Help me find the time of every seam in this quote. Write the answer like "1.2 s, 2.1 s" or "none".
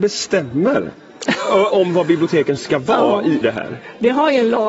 1.7 s, 2.6 s, 3.4 s